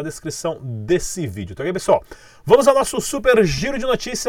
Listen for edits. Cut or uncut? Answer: uncut